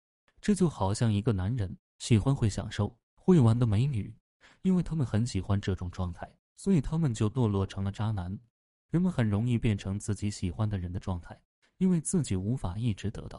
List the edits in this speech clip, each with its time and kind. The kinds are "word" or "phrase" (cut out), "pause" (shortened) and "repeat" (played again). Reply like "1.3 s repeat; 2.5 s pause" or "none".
none